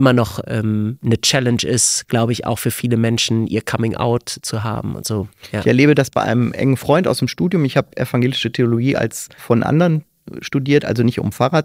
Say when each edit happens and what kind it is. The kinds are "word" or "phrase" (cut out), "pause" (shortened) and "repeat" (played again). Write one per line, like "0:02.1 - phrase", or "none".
0:09.4 - word